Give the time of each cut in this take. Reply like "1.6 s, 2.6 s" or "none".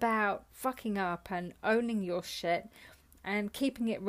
none